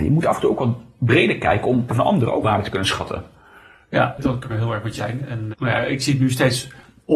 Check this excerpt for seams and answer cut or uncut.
cut